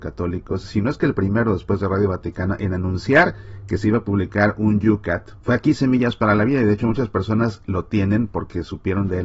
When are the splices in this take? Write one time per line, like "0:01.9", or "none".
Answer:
0:05.4